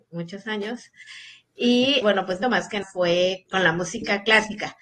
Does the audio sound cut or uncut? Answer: cut